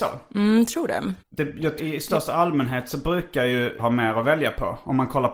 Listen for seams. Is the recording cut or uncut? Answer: cut